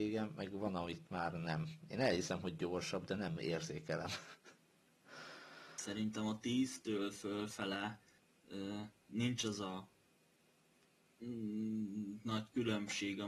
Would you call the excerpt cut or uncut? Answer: uncut